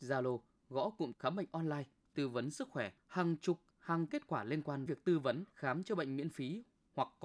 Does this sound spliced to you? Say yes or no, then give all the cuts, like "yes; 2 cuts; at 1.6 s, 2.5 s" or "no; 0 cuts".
yes; 5 cuts; at 1.1 s, 3.0 s, 4.1 s, 4.9 s, 5.5 s